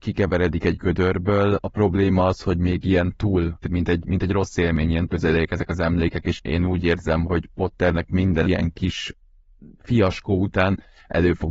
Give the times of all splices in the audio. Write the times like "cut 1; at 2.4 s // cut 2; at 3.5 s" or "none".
cut 1; at 1.6 s // cut 2; at 3.6 s // cut 3; at 5.1 s // cut 4; at 6.3 s // cut 5; at 7.2 s // cut 6; at 8.4 s